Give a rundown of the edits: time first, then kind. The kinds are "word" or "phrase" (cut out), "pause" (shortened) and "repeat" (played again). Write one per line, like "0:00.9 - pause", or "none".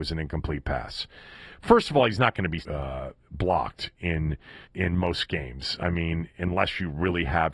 0:02.6 - phrase
0:04.0 - word
0:04.6 - pause